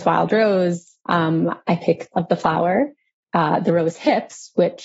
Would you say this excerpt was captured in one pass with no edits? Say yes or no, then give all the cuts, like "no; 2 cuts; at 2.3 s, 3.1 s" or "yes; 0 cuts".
no; 2 cuts; at 1.0 s, 2.1 s